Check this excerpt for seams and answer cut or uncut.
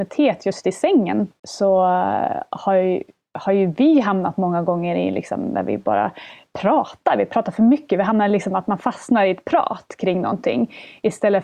uncut